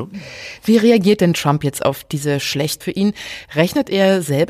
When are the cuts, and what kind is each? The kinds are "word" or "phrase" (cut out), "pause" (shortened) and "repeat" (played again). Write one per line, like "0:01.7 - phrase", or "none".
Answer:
0:02.8 - word